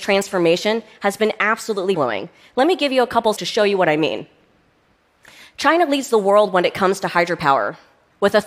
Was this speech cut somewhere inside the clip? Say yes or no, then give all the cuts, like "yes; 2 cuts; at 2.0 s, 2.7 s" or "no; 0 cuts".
yes; 2 cuts; at 1.9 s, 3.4 s